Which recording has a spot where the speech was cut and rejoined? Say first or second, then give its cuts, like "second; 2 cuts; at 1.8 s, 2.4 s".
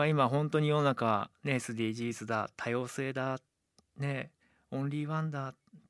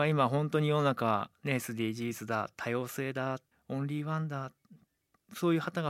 second; 1 cut; at 3.5 s